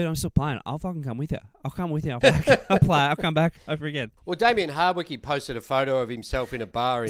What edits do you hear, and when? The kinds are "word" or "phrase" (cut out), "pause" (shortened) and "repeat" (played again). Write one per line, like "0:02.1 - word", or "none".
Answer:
0:02.2 - word
0:04.2 - pause